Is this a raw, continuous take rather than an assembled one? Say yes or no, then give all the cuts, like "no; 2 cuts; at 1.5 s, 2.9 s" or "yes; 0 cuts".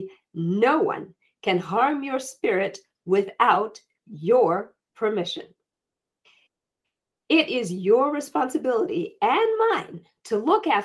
yes; 0 cuts